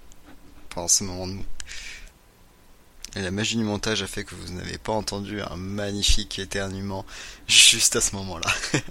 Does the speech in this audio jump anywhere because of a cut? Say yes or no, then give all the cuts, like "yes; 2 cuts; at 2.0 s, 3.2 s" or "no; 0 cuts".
no; 0 cuts